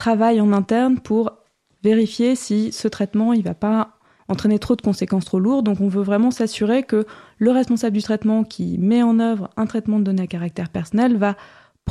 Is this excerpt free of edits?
yes; 0 cuts

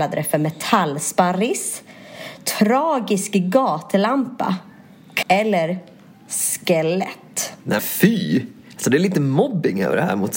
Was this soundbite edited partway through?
yes; 2 cuts; at 5.2 s, 7.8 s

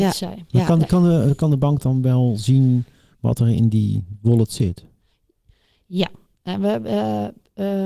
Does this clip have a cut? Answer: no; 0 cuts

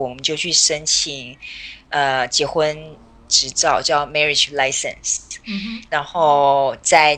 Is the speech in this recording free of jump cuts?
yes; 0 cuts

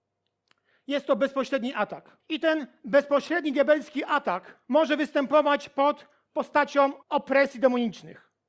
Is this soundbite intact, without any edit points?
no; 3 cuts; at 2.2 s, 4.6 s, 7.0 s

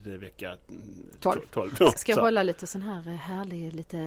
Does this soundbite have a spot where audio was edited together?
yes; 1 cut; at 2.0 s

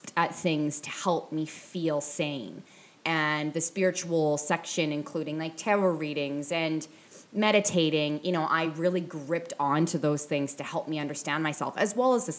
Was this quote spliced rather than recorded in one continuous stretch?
no; 0 cuts

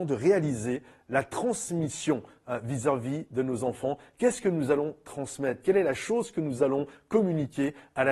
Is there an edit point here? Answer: no; 0 cuts

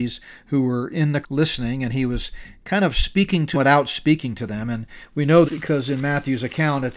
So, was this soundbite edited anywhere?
yes; 3 cuts; at 1.2 s, 3.5 s, 5.4 s

